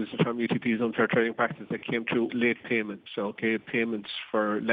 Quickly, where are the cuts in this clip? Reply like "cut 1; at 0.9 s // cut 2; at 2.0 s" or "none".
cut 1; at 2.3 s